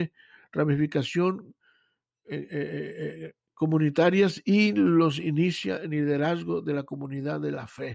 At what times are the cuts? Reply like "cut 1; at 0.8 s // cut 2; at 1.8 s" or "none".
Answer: none